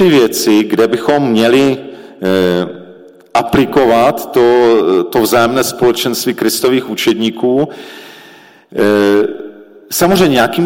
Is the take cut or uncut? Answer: uncut